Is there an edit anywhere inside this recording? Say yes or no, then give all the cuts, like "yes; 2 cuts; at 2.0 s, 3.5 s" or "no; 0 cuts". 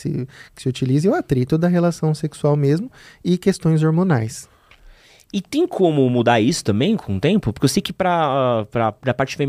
no; 0 cuts